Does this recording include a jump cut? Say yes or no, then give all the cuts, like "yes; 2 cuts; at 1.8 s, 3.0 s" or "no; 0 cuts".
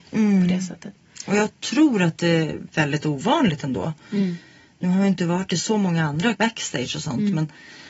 yes; 1 cut; at 6.3 s